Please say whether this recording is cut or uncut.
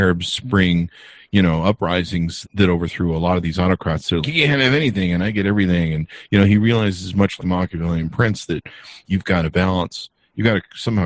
cut